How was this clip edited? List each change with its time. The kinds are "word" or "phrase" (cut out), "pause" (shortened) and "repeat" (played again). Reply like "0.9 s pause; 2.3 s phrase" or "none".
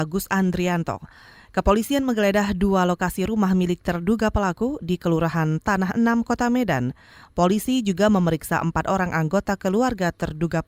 none